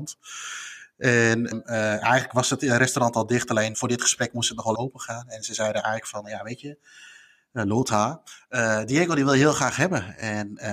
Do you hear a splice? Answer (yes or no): yes